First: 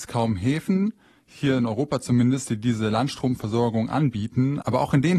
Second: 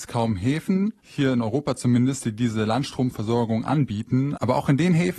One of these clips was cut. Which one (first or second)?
second